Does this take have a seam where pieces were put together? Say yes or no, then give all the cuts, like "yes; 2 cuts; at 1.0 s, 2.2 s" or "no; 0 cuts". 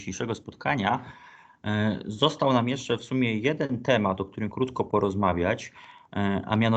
yes; 1 cut; at 4.5 s